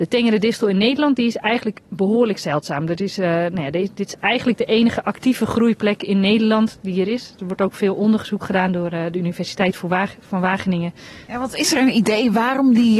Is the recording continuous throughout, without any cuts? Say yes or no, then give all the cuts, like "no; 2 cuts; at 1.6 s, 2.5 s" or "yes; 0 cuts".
no; 1 cut; at 1.9 s